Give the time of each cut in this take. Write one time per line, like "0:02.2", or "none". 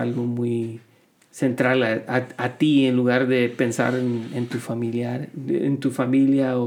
0:01.0